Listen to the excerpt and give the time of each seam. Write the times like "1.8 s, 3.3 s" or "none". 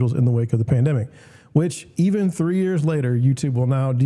none